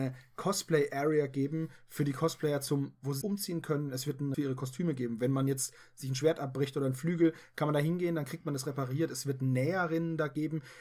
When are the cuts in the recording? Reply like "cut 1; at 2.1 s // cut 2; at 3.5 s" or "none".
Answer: cut 1; at 3.2 s // cut 2; at 4.3 s